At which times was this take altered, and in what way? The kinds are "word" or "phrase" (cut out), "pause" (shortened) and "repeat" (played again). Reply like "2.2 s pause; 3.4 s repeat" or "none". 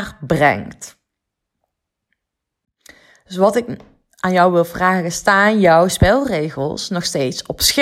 none